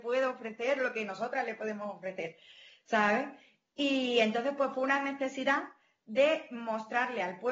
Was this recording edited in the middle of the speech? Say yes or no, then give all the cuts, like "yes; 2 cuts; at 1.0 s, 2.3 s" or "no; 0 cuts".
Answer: no; 0 cuts